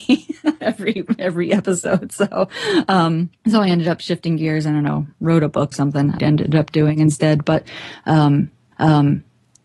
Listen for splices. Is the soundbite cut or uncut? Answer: cut